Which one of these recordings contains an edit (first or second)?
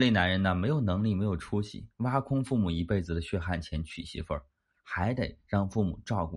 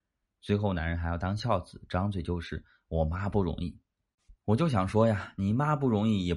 second